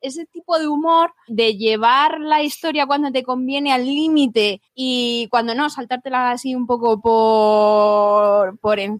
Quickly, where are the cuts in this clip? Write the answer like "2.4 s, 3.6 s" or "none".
1.3 s, 4.7 s